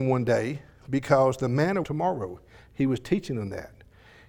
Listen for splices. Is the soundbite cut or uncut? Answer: cut